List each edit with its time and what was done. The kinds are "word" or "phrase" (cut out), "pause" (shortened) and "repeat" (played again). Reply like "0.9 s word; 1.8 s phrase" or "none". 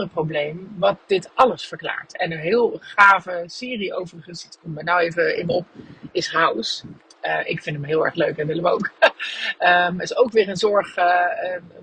none